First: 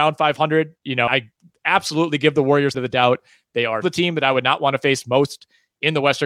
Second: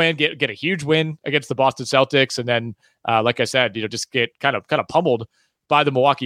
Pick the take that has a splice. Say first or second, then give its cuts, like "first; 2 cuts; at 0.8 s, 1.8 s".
first; 3 cuts; at 1.1 s, 2.7 s, 3.8 s